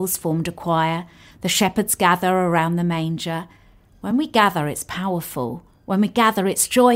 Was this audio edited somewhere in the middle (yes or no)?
no